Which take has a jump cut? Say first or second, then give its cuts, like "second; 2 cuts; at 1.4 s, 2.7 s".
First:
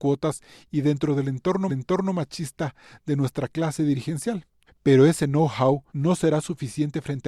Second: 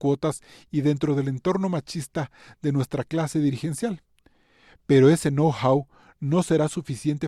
first; 3 cuts; at 1.7 s, 4.7 s, 5.9 s